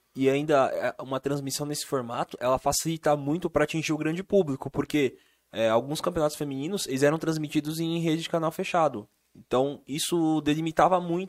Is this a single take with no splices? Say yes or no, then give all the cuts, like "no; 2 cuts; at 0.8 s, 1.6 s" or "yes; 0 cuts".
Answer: yes; 0 cuts